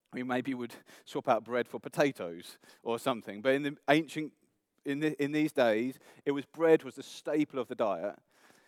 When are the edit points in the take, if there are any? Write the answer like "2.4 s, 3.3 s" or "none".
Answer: none